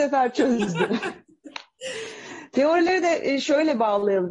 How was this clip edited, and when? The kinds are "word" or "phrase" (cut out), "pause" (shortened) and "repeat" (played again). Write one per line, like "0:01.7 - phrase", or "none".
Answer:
none